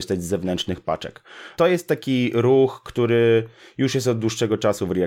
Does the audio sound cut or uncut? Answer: uncut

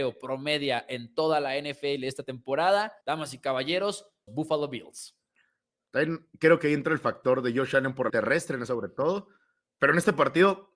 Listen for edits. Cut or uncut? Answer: cut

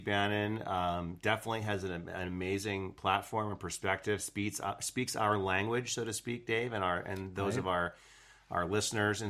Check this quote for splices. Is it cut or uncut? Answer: uncut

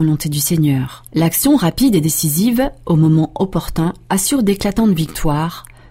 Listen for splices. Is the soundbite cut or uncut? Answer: cut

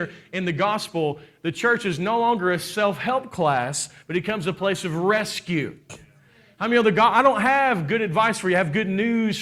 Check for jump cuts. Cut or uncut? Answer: uncut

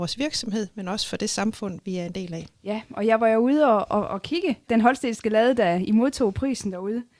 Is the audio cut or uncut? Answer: cut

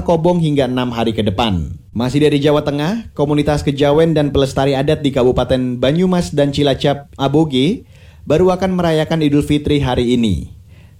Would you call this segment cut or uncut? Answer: cut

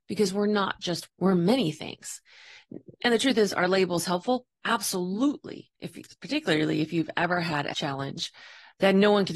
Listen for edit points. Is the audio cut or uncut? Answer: cut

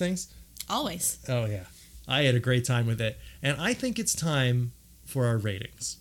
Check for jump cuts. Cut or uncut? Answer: uncut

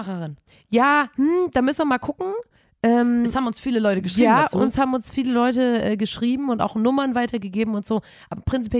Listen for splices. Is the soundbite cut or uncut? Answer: uncut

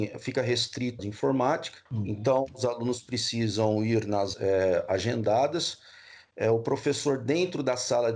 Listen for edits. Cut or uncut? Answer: cut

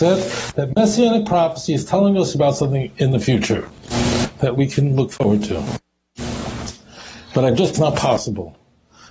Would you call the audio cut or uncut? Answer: cut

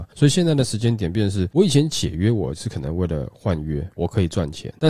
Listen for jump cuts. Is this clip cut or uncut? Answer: cut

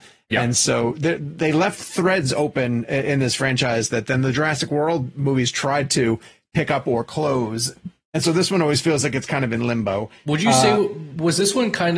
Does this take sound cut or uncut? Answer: uncut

